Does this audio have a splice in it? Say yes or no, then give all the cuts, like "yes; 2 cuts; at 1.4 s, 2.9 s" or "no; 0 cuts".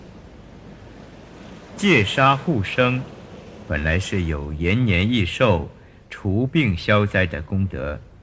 no; 0 cuts